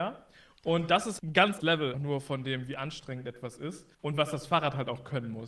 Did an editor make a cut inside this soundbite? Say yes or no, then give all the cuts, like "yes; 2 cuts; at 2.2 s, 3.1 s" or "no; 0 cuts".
yes; 4 cuts; at 1.2 s, 1.6 s, 1.9 s, 3.9 s